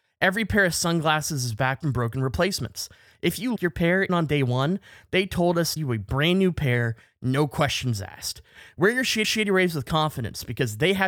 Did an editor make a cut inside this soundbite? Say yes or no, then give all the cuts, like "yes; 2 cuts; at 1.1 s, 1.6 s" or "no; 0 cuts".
yes; 5 cuts; at 1.8 s, 3.6 s, 4.1 s, 5.8 s, 9.2 s